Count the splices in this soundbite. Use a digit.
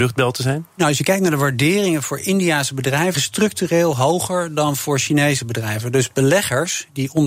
1